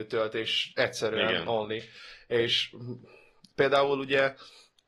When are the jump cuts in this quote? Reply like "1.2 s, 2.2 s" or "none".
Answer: none